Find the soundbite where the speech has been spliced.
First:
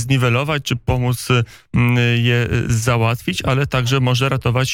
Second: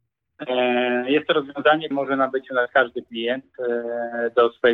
second; 1 cut; at 1.9 s

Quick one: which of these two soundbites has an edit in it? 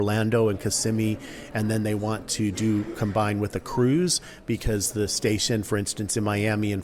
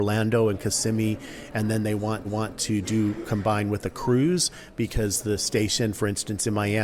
second; 1 cut; at 2.2 s

